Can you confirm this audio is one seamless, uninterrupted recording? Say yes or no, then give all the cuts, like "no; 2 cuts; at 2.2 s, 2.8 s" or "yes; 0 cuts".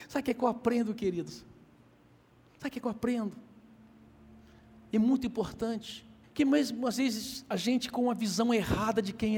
no; 1 cut; at 6.2 s